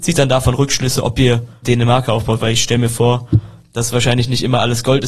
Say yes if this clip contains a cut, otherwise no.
yes